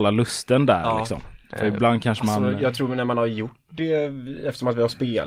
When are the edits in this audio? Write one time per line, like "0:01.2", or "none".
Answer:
0:01.4